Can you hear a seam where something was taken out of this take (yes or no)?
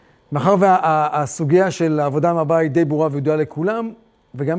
no